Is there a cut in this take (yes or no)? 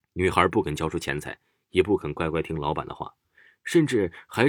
no